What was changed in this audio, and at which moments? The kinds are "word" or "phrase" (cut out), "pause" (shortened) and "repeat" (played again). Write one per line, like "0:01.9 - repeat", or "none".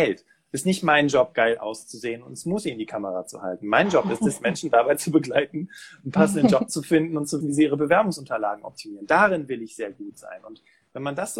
0:07.4 - word